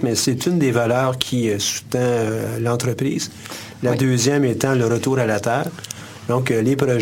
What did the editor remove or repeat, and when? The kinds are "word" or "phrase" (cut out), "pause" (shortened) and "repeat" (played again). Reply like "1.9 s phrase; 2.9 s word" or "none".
none